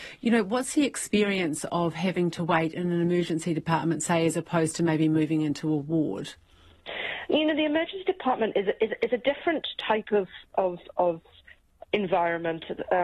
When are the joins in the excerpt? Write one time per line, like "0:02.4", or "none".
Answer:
none